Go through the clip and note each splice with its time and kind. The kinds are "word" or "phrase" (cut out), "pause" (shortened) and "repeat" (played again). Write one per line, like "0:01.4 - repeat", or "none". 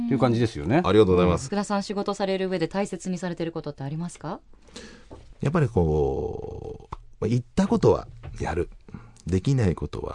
0:01.5 - phrase